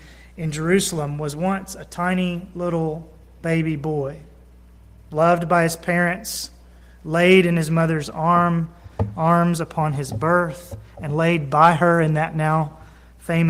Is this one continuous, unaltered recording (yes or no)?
yes